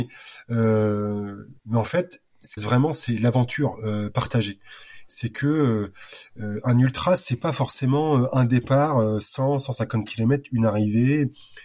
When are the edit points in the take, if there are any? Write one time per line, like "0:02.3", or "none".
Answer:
0:01.6
0:02.6